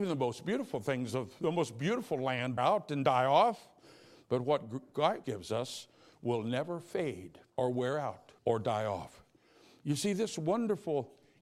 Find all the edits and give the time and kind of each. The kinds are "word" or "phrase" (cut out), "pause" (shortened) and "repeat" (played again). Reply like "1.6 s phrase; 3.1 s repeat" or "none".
2.6 s word; 5.2 s word; 7.5 s pause; 8.4 s pause